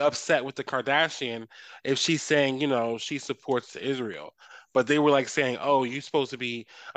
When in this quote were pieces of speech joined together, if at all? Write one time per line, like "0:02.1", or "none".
none